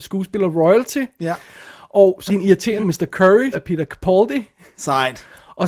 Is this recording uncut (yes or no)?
no